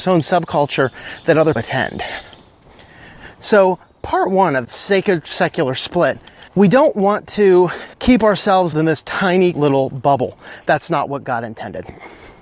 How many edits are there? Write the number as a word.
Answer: six